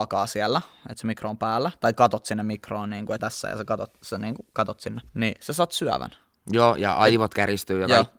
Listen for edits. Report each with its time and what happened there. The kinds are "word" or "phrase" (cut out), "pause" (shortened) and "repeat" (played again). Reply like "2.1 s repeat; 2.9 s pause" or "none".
3.2 s phrase; 5.1 s pause